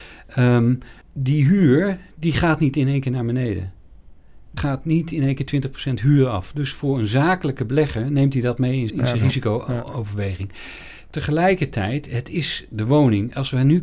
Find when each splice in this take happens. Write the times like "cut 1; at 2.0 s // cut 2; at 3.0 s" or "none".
cut 1; at 1.0 s // cut 2; at 4.6 s // cut 3; at 8.9 s